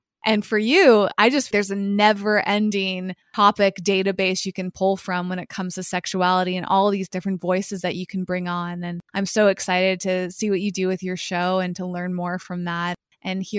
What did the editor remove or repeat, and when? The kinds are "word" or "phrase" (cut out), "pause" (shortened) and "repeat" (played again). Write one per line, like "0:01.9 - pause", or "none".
0:01.5 - word
0:03.2 - pause
0:09.0 - pause